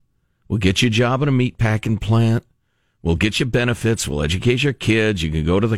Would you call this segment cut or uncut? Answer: uncut